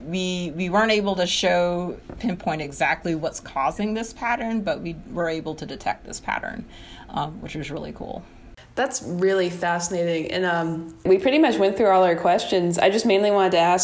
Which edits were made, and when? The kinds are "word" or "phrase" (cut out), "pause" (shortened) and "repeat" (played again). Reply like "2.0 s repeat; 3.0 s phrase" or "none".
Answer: none